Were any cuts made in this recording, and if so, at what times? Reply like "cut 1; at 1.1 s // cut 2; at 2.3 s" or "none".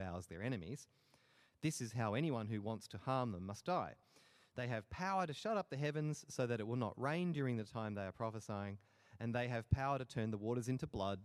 none